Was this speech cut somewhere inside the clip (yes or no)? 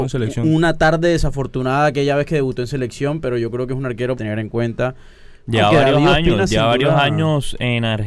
yes